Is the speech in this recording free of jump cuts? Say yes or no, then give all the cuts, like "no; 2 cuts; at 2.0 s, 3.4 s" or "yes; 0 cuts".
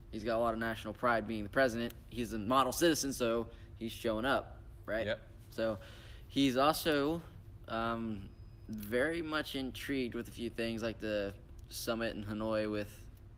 yes; 0 cuts